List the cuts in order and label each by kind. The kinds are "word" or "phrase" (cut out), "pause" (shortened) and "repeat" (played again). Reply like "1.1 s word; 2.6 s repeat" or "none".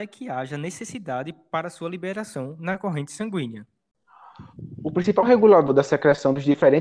none